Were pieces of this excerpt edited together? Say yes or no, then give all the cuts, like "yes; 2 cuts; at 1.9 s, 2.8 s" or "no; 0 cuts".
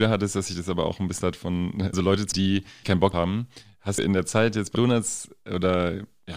yes; 7 cuts; at 1.2 s, 1.9 s, 2.3 s, 2.8 s, 3.1 s, 4.0 s, 4.7 s